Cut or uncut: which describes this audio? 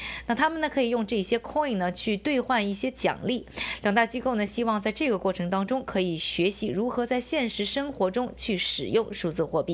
uncut